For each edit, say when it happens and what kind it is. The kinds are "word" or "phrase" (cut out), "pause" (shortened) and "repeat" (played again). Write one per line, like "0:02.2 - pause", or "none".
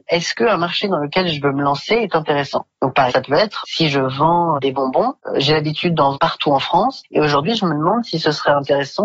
0:03.1 - word
0:03.6 - word
0:04.6 - word
0:06.1 - word